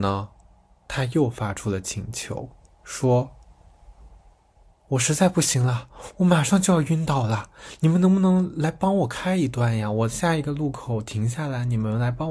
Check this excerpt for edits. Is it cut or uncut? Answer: uncut